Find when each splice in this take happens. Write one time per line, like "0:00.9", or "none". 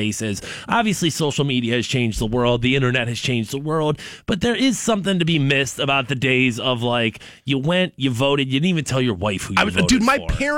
none